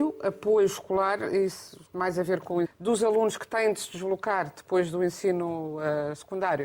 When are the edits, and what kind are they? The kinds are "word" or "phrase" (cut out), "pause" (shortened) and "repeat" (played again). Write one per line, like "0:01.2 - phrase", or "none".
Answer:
0:02.6 - phrase